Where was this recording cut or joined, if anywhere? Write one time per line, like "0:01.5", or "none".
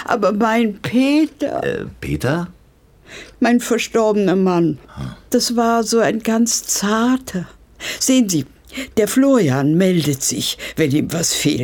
0:04.8
0:08.9